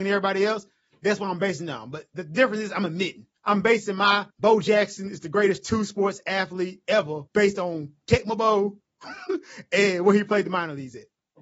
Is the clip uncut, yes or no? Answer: no